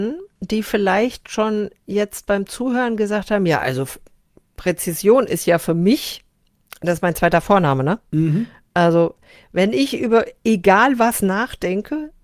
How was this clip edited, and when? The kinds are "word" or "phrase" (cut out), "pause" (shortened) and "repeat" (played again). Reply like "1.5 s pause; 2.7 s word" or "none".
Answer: none